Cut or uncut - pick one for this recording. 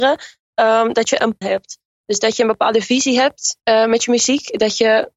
cut